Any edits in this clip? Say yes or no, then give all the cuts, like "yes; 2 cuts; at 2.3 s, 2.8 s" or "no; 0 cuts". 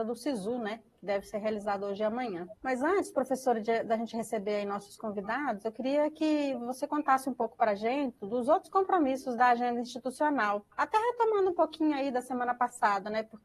yes; 2 cuts; at 2.6 s, 10.7 s